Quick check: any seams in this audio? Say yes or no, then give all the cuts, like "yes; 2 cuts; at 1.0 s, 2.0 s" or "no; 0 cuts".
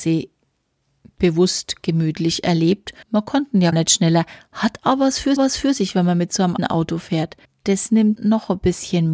yes; 6 cuts; at 3.0 s, 3.7 s, 5.4 s, 6.6 s, 7.5 s, 8.2 s